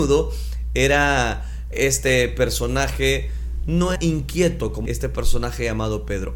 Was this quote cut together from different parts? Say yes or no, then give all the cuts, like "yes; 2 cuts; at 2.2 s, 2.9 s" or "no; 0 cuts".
yes; 3 cuts; at 1.7 s, 4.0 s, 4.9 s